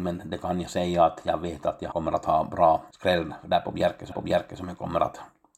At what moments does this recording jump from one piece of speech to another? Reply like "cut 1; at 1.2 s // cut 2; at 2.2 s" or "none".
cut 1; at 1.9 s // cut 2; at 2.9 s // cut 3; at 4.1 s